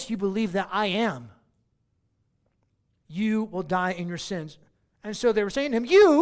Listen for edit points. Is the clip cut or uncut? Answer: uncut